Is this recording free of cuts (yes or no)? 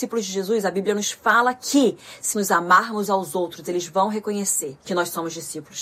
no